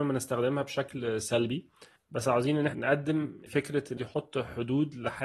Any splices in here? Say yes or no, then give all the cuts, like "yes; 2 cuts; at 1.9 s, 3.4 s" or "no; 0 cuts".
yes; 4 cuts; at 2.0 s, 2.7 s, 3.5 s, 4.0 s